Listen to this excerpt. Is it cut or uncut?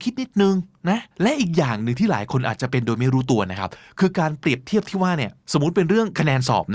cut